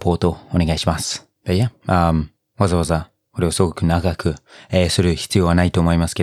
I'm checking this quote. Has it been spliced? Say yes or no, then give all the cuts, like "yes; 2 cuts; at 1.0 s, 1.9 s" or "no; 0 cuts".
no; 0 cuts